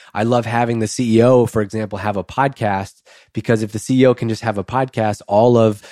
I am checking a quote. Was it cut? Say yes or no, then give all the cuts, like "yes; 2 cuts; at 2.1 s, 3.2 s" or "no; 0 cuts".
no; 0 cuts